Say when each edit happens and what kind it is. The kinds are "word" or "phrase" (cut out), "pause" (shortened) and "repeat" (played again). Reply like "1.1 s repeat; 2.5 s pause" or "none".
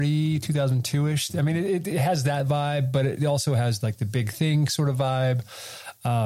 none